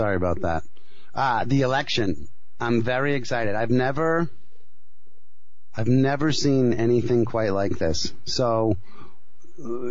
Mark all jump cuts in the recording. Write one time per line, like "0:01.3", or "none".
none